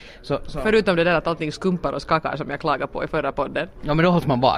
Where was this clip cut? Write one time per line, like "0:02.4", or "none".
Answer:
none

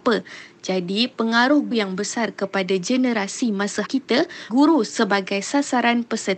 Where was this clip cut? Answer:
0:01.7
0:03.8
0:04.5

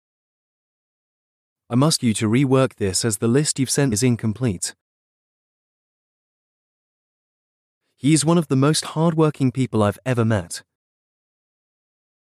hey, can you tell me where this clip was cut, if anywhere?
0:02.0
0:03.9

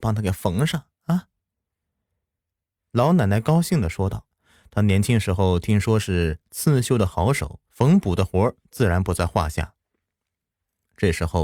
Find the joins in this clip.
0:04.3
0:07.7

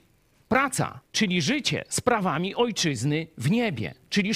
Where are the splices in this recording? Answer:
0:01.1

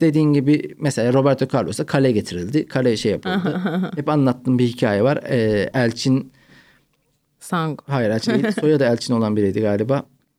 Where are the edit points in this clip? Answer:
0:08.2

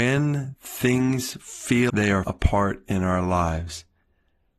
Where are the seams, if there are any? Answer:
0:01.9
0:02.2

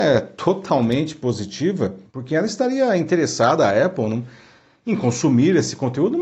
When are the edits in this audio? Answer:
0:02.1

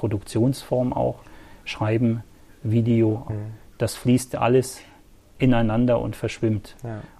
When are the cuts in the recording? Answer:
0:03.3

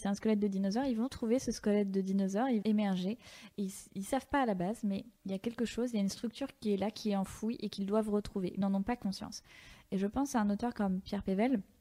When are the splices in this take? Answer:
0:02.6
0:05.2
0:08.6

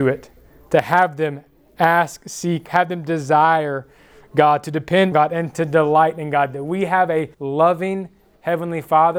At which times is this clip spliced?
0:02.7
0:05.1
0:07.3

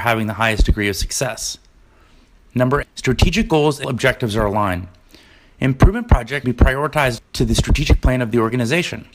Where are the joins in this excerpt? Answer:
0:02.8
0:03.8
0:06.4
0:07.2

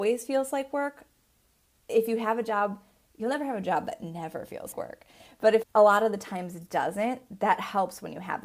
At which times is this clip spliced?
0:04.7
0:05.6

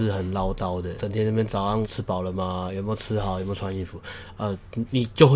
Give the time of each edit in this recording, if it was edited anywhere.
0:01.0
0:01.8

